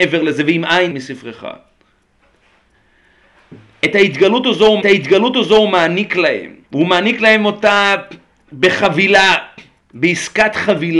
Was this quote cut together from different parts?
yes; 4 cuts; at 0.9 s, 4.8 s, 6.6 s, 9.8 s

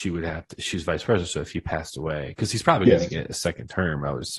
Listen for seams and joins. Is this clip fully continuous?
yes; 0 cuts

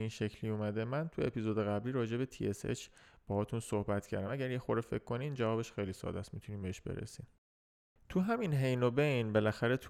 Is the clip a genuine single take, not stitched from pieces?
yes; 0 cuts

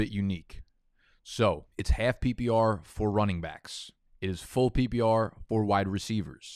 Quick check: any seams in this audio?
yes; 2 cuts; at 1.7 s, 4.1 s

